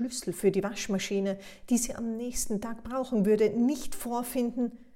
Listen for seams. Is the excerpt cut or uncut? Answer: uncut